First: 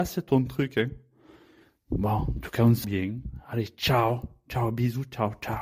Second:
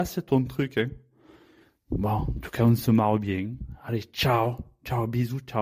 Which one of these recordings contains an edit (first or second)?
first